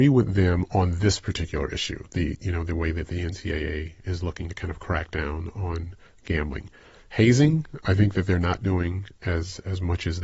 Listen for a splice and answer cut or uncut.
uncut